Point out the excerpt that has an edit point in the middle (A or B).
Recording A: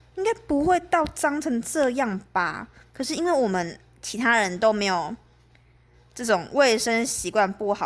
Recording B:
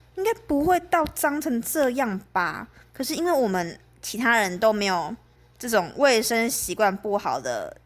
B